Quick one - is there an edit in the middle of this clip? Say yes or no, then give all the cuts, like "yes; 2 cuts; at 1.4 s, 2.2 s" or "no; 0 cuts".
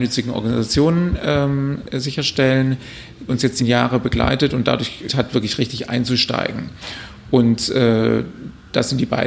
yes; 3 cuts; at 3.3 s, 3.6 s, 5.1 s